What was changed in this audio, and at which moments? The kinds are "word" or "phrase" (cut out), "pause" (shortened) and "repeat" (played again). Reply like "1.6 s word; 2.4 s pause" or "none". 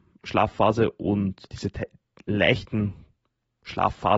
none